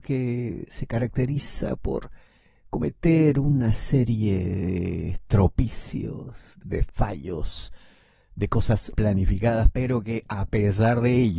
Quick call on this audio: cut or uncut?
cut